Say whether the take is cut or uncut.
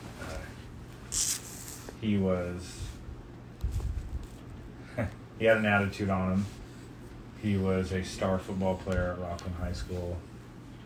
uncut